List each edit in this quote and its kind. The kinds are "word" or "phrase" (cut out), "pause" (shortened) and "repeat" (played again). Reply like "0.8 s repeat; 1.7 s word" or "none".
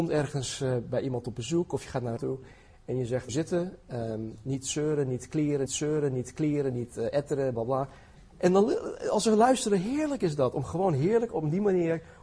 2.2 s word; 3.3 s phrase; 5.7 s repeat; 7.5 s word